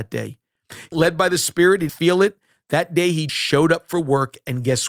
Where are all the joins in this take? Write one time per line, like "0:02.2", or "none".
0:00.9
0:01.9
0:03.3